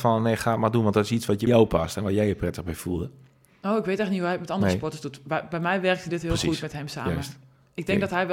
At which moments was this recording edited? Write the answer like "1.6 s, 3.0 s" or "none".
1.5 s